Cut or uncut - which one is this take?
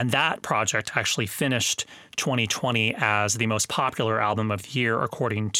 uncut